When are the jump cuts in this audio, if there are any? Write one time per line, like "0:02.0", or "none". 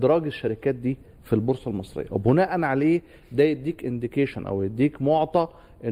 none